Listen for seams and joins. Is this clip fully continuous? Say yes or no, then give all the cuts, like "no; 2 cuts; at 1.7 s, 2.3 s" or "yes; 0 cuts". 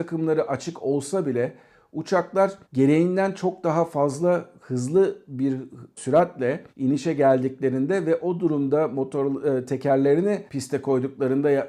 no; 3 cuts; at 2.6 s, 6.7 s, 10.5 s